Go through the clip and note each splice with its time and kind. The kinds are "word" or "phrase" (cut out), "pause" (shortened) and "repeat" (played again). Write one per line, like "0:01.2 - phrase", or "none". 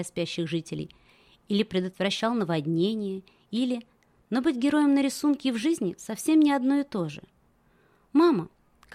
none